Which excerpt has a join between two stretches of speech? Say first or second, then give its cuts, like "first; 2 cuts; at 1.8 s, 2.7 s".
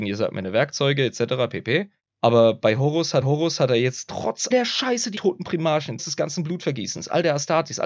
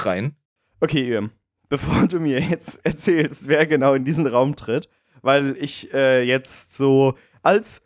first; 5 cuts; at 2.0 s, 3.2 s, 4.5 s, 5.2 s, 6.0 s